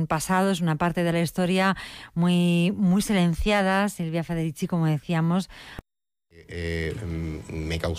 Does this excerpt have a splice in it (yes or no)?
no